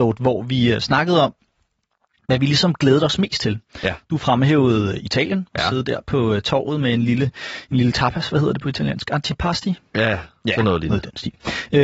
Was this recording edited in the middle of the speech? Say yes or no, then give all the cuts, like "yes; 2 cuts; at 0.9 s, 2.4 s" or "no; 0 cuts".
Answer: no; 0 cuts